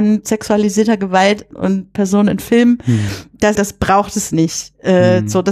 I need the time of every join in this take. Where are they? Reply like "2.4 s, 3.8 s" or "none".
1.5 s, 2.0 s, 3.6 s